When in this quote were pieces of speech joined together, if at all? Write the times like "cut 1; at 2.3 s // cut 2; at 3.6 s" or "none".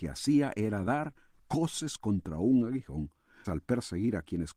cut 1; at 3.4 s